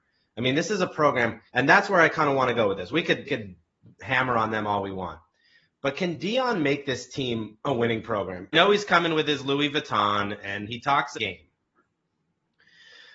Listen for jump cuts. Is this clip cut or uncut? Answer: cut